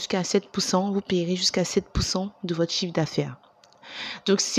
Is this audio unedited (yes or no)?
yes